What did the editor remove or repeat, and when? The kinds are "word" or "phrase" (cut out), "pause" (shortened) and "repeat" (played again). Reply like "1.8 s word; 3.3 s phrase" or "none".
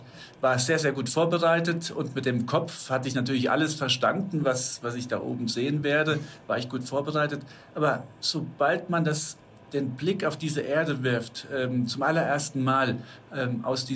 none